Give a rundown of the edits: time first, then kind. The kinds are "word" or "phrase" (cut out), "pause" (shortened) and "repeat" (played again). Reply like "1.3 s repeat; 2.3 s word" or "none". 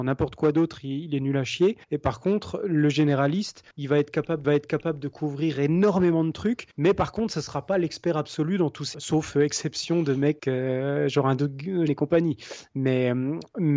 1.8 s pause; 3.7 s pause; 4.4 s repeat; 6.7 s pause; 8.9 s word; 10.4 s word; 11.9 s word